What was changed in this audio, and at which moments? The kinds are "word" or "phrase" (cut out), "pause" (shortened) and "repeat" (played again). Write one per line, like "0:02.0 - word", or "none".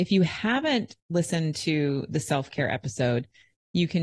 none